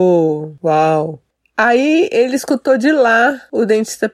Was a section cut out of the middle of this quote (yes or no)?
no